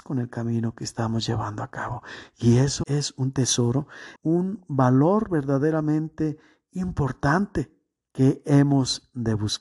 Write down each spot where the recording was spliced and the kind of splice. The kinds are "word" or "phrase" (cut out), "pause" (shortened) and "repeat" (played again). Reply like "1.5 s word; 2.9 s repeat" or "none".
2.8 s word; 4.2 s word